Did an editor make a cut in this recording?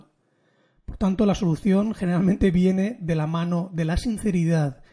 no; 0 cuts

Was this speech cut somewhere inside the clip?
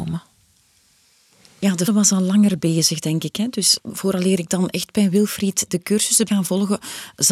yes; 3 cuts; at 1.9 s, 3.8 s, 6.3 s

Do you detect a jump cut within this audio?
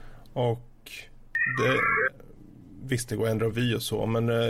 no; 0 cuts

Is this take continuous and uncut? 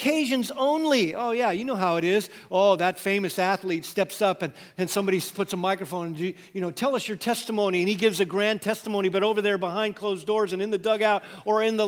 yes; 0 cuts

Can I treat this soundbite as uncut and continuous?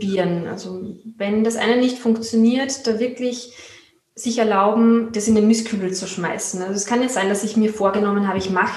yes; 0 cuts

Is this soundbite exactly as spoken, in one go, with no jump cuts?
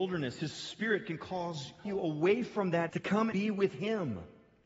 no; 3 cuts; at 1.9 s, 2.9 s, 3.3 s

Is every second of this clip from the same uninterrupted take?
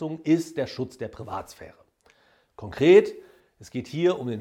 yes; 0 cuts

